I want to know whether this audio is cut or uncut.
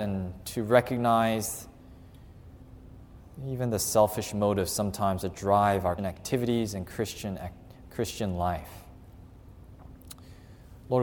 cut